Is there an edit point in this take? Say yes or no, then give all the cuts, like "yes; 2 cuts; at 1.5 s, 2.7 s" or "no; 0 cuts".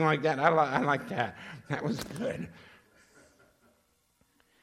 no; 0 cuts